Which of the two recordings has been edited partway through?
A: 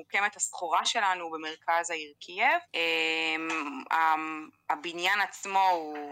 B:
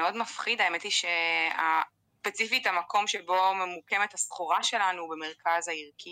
A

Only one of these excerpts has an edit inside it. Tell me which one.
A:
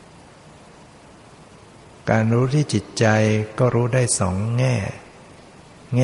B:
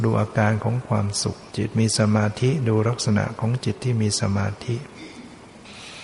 B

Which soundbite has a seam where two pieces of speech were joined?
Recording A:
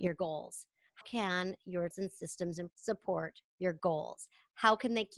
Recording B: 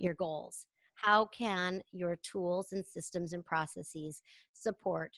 A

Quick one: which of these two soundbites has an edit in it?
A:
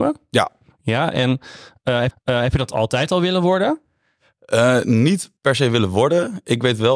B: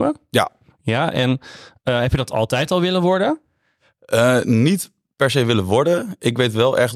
A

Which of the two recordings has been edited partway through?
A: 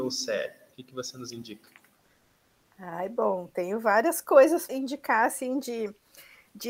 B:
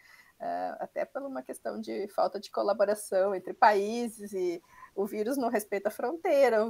A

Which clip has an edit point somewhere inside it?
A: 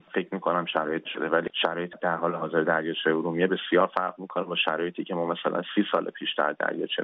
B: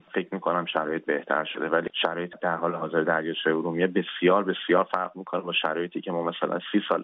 A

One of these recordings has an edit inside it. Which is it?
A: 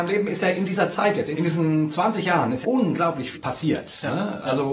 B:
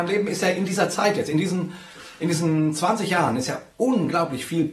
A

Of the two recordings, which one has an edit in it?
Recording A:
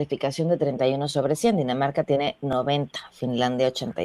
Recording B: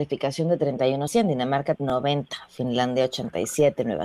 B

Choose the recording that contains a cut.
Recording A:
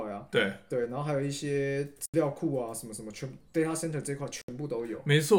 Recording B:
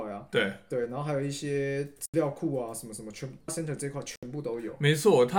B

